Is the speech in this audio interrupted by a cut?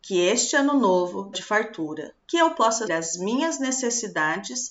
yes; 3 cuts; at 1.3 s, 2.2 s, 2.9 s

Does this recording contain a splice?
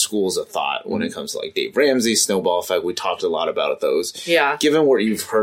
no; 0 cuts

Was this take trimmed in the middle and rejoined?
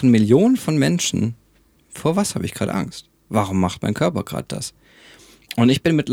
no; 0 cuts

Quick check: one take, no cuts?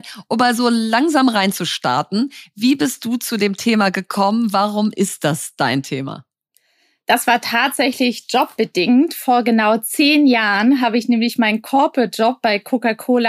yes; 0 cuts

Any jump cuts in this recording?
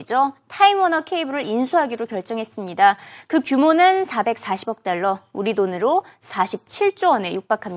no; 0 cuts

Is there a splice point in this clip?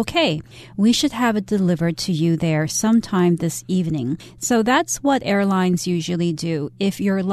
no; 0 cuts

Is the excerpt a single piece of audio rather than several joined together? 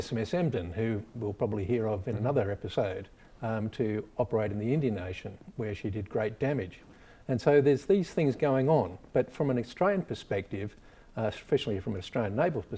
yes; 0 cuts

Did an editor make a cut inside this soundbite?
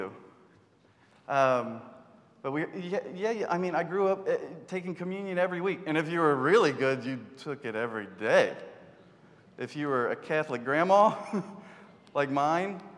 no; 0 cuts

